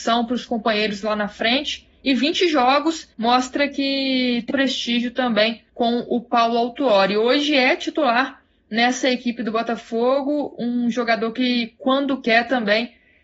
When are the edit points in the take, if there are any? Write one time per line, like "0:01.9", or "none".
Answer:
0:03.1
0:04.5
0:05.7